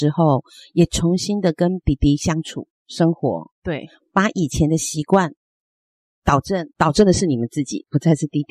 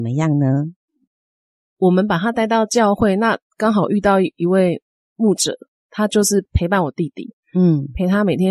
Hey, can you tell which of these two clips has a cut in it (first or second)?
first